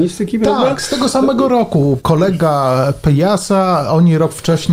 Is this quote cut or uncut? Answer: uncut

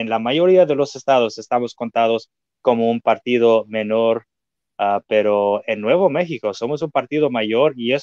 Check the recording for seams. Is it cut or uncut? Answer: uncut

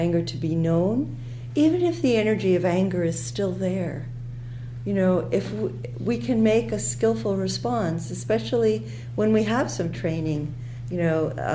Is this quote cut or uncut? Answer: uncut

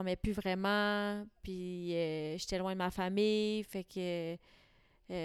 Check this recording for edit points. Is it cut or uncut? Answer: uncut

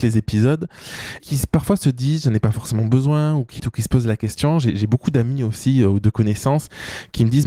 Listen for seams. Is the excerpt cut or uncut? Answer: cut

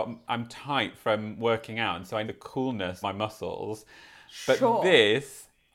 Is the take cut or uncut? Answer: cut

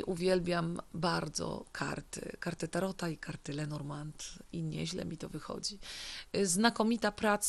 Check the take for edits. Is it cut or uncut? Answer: uncut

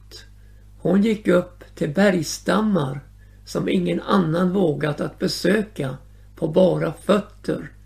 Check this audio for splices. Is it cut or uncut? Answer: uncut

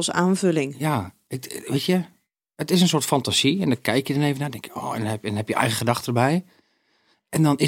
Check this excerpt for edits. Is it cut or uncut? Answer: uncut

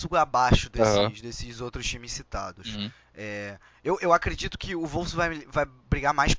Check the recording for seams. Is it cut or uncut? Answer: uncut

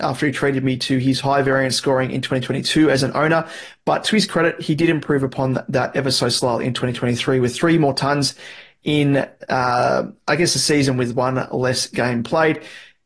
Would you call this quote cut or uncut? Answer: uncut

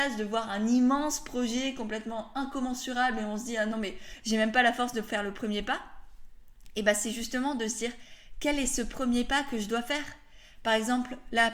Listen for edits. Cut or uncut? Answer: uncut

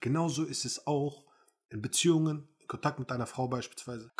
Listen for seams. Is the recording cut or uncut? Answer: uncut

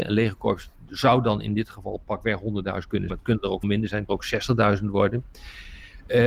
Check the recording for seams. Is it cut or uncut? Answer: cut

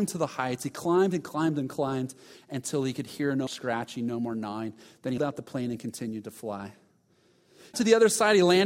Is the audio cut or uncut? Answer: cut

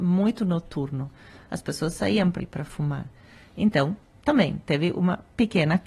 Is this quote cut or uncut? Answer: cut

